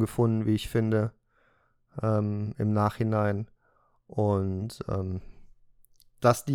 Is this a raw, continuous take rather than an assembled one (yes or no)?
yes